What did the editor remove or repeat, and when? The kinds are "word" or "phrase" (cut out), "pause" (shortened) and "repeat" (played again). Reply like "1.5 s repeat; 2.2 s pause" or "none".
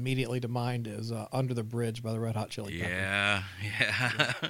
none